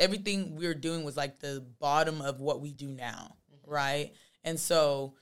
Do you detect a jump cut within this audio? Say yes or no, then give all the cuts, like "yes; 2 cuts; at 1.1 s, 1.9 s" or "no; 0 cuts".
no; 0 cuts